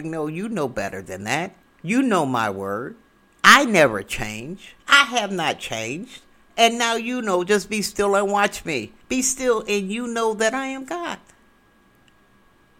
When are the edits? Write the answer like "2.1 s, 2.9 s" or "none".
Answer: 1.6 s, 4.8 s, 9.0 s